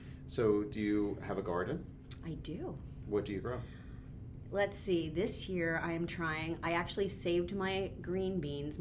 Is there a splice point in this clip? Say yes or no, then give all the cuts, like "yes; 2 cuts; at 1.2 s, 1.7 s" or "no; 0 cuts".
no; 0 cuts